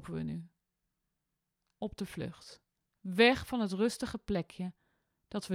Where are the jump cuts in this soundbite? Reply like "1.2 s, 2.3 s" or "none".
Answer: 2.8 s